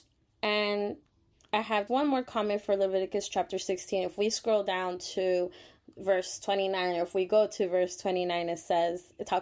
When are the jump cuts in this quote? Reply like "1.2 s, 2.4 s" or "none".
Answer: 1.9 s